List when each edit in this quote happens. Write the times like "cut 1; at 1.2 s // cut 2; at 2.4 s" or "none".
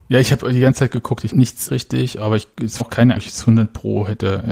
cut 1; at 1.3 s // cut 2; at 1.7 s // cut 3; at 2.8 s // cut 4; at 3.2 s